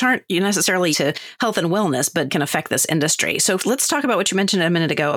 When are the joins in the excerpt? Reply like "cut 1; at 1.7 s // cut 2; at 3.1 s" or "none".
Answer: cut 1; at 0.9 s // cut 2; at 2.3 s // cut 3; at 3.6 s